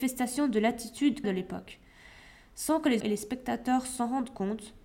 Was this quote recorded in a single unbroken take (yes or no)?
no